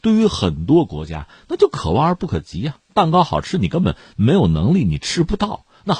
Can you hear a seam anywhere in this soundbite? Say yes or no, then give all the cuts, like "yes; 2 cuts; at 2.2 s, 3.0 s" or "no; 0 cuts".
yes; 1 cut; at 2.9 s